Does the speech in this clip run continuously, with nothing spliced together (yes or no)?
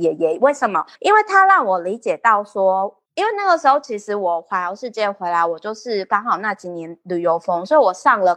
no